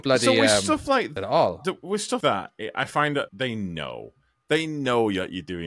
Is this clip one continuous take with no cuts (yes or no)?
no